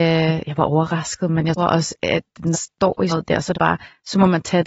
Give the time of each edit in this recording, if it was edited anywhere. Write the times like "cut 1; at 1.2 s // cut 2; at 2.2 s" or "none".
cut 1; at 1.6 s // cut 2; at 2.5 s // cut 3; at 3.1 s // cut 4; at 3.5 s